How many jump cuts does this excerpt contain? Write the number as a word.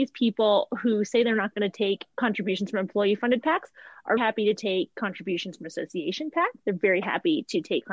two